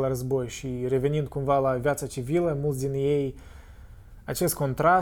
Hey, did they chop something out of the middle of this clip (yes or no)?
no